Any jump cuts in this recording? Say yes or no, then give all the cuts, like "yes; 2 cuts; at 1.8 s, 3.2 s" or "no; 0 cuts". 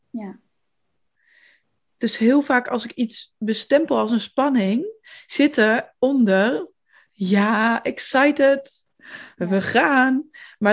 no; 0 cuts